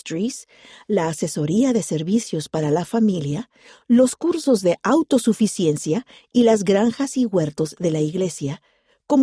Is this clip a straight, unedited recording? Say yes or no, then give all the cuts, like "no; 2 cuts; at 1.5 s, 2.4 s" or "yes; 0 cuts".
yes; 0 cuts